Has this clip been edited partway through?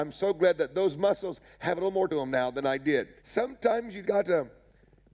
yes; 3 cuts; at 2.1 s, 3.2 s, 4.0 s

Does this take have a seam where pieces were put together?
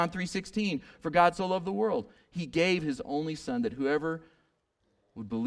no; 0 cuts

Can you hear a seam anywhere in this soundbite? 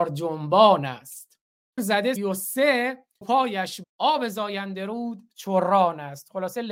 yes; 4 cuts; at 1.8 s, 2.2 s, 3.2 s, 3.8 s

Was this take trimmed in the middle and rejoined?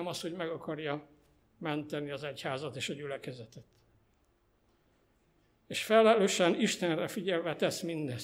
no; 0 cuts

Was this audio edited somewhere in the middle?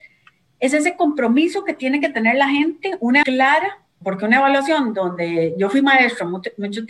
yes; 2 cuts; at 3.2 s, 4.0 s

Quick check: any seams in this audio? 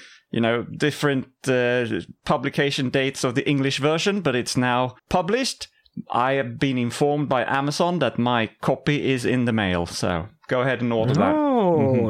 yes; 1 cut; at 5.0 s

